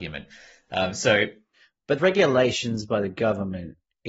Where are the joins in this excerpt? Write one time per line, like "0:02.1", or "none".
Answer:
0:02.0

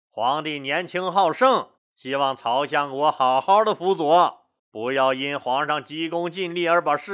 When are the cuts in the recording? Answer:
0:01.8
0:04.6

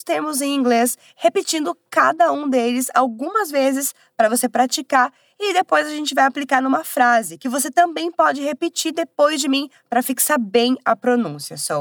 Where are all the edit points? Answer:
none

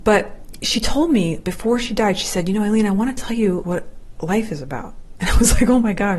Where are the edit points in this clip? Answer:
0:03.6

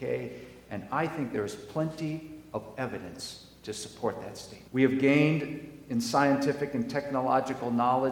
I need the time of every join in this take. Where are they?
0:04.7

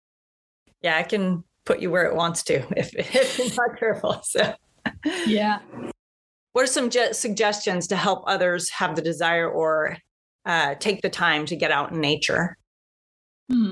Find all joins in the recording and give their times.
none

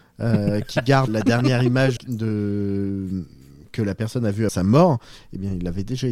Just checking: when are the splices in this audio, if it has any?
0:01.1
0:02.0
0:04.5

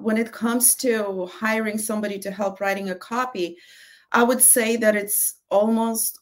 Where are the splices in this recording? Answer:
none

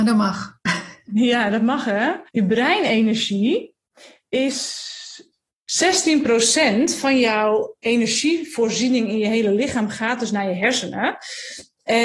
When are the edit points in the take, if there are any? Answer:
0:02.3

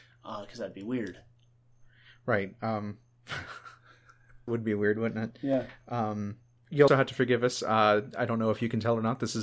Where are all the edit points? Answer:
0:04.5
0:06.9

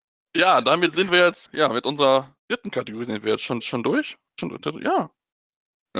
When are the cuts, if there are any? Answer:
0:01.5
0:02.4
0:03.6
0:04.4

